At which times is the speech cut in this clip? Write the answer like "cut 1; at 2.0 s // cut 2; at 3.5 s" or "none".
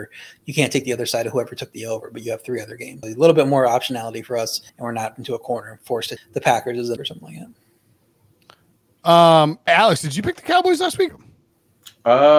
cut 1; at 3.0 s // cut 2; at 4.7 s // cut 3; at 5.2 s // cut 4; at 6.2 s // cut 5; at 7.0 s // cut 6; at 9.7 s // cut 7; at 11.1 s

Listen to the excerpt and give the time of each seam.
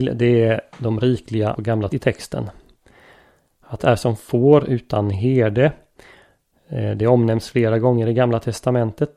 cut 1; at 1.5 s // cut 2; at 1.9 s // cut 3; at 3.8 s

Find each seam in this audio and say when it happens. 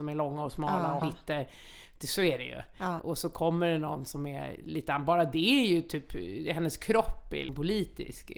cut 1; at 1.0 s

